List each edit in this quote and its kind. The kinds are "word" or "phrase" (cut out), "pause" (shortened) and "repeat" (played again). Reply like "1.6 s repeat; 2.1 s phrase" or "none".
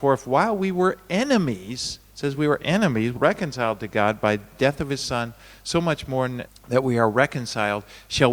2.0 s pause; 3.2 s word; 6.5 s word